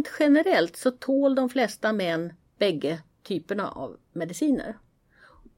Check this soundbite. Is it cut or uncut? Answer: uncut